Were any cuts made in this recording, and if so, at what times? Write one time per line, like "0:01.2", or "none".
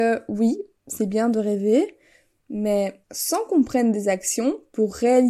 0:03.0

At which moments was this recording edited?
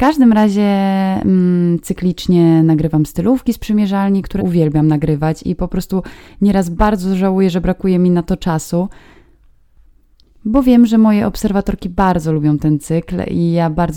0:04.4

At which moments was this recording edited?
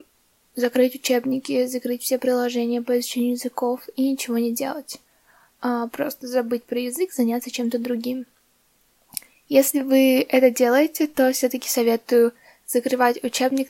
none

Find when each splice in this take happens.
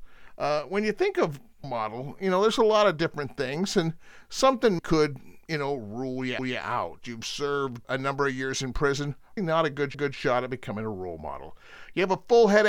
0:01.6
0:04.8
0:06.4
0:07.8
0:09.4
0:09.9

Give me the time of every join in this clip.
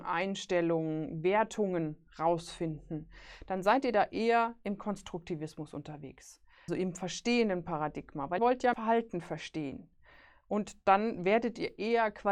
0:06.7
0:08.4
0:08.7

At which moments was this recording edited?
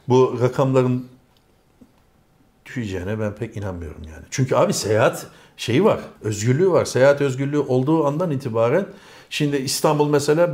0:06.1

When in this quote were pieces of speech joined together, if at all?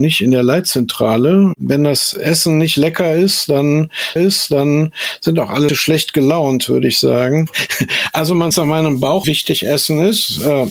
0:04.2
0:05.7
0:08.5
0:09.2

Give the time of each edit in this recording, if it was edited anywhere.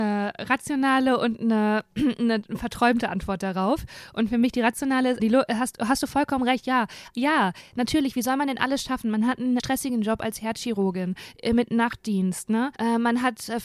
0:05.2
0:09.6
0:12.8

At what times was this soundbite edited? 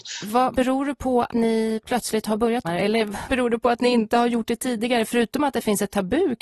0:01.3
0:02.6
0:03.3

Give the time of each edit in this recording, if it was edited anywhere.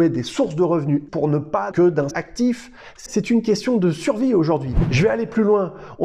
0:01.1
0:01.7
0:02.1
0:03.1

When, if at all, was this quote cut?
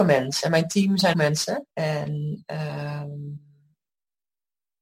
0:01.1
0:01.7

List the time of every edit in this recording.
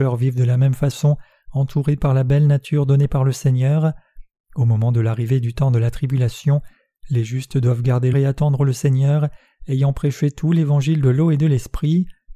0:08.1

